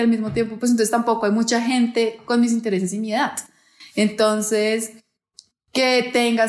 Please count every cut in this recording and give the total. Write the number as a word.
zero